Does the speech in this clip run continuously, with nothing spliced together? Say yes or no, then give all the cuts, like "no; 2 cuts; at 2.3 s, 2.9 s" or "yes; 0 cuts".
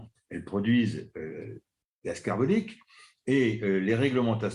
yes; 0 cuts